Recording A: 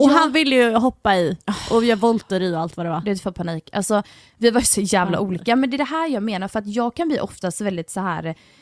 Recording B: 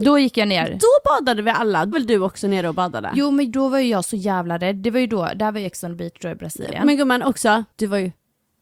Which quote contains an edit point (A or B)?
B